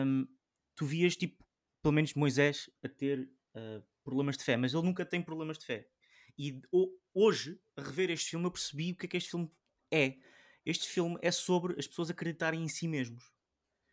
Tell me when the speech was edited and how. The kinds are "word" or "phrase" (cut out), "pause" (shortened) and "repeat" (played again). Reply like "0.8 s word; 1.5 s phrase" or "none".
none